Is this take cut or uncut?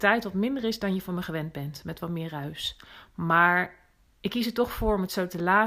uncut